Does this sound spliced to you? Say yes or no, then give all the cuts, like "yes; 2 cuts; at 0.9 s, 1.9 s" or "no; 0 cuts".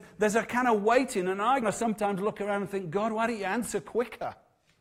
yes; 1 cut; at 1.6 s